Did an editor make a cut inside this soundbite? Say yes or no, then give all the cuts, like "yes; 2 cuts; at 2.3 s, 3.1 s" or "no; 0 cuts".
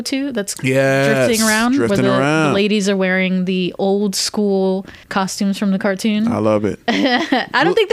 yes; 1 cut; at 5.0 s